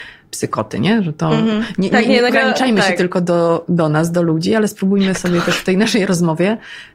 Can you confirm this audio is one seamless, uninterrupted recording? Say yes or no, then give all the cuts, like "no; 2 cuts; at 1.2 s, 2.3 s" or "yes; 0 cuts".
no; 1 cut; at 2.3 s